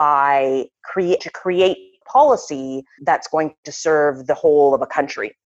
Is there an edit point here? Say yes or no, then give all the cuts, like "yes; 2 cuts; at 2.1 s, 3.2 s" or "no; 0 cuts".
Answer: yes; 3 cuts; at 1.2 s, 2.0 s, 3.0 s